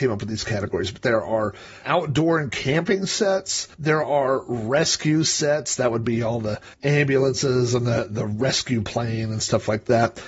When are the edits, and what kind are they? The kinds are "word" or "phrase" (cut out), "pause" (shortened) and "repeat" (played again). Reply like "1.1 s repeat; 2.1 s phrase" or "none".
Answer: 1.8 s word; 3.7 s pause; 6.7 s pause